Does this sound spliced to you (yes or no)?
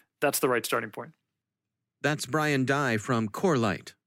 no